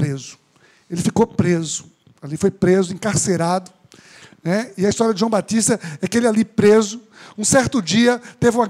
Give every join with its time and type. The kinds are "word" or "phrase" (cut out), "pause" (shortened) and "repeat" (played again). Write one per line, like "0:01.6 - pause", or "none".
none